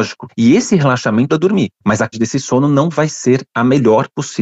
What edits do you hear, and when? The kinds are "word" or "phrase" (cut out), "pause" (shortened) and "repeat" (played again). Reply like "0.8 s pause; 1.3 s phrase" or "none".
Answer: 1.3 s word; 2.1 s word